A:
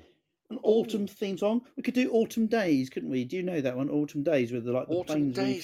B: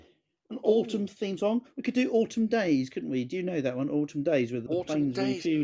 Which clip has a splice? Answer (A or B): B